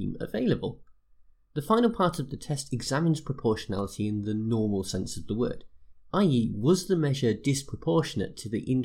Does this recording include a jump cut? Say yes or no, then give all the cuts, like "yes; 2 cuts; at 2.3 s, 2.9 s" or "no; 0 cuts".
no; 0 cuts